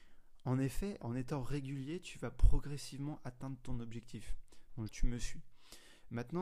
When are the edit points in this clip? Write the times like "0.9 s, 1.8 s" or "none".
1.0 s, 4.9 s